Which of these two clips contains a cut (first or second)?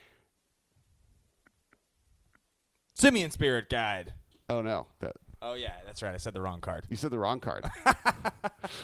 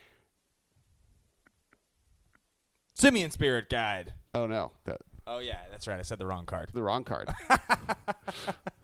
second